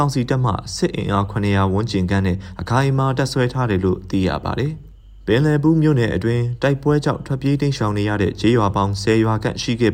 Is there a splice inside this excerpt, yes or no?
no